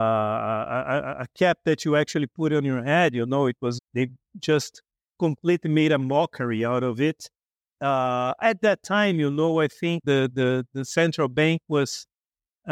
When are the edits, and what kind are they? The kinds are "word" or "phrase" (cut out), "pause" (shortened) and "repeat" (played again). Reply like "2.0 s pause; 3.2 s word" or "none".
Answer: 3.8 s word; 10.0 s word